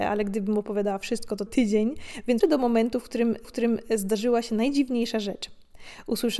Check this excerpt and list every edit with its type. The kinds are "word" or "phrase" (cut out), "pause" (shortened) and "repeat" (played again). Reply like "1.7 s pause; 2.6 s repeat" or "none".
1.5 s phrase; 2.4 s word; 3.4 s repeat